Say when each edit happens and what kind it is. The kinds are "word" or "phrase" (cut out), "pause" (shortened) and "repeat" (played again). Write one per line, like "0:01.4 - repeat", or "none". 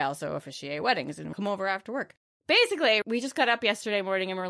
0:01.3 - phrase
0:03.0 - word